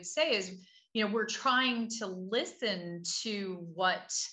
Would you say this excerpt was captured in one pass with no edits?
yes; 0 cuts

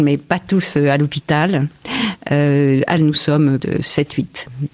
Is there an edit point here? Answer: yes; 2 cuts; at 3.0 s, 3.6 s

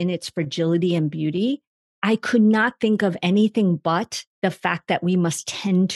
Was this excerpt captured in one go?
no; 1 cut; at 4.3 s

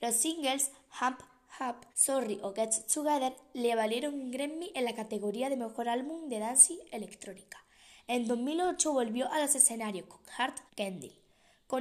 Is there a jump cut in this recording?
yes; 2 cuts; at 1.9 s, 10.7 s

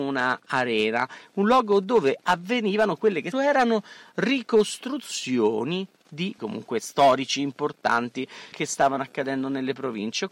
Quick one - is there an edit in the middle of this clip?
yes; 3 cuts; at 3.3 s, 6.4 s, 8.5 s

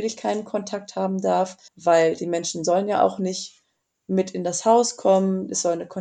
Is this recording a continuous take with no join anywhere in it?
no; 1 cut; at 1.7 s

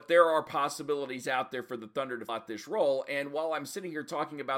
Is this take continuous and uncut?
no; 1 cut; at 2.3 s

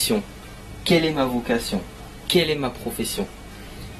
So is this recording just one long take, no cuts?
yes; 0 cuts

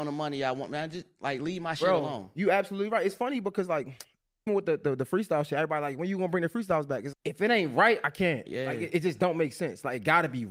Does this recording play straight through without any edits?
no; 3 cuts; at 4.5 s, 7.1 s, 8.5 s

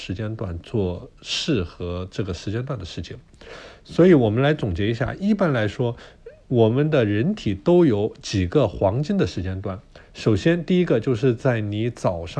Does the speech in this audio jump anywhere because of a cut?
no; 0 cuts

